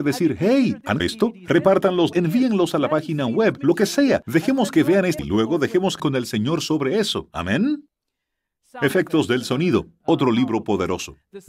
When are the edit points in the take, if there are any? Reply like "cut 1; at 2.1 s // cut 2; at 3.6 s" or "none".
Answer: cut 1; at 1.0 s // cut 2; at 2.1 s // cut 3; at 5.2 s // cut 4; at 6.0 s